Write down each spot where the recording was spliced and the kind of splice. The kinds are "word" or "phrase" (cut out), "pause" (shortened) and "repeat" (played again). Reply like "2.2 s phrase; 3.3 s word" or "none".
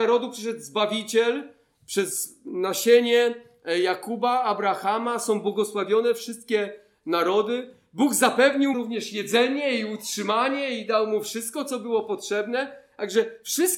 8.7 s word